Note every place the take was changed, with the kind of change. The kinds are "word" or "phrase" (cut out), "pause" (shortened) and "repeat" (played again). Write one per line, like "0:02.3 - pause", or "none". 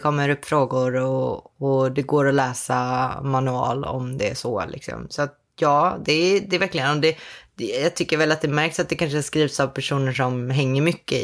none